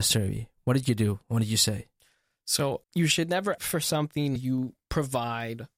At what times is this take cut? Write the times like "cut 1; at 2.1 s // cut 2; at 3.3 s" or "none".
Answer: cut 1; at 2.8 s // cut 2; at 3.6 s // cut 3; at 4.4 s // cut 4; at 4.8 s